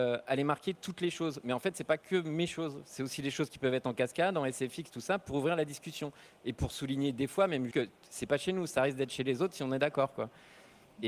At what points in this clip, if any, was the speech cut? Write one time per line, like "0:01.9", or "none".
0:07.7